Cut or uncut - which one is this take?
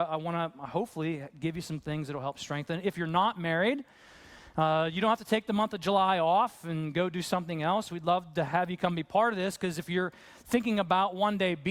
uncut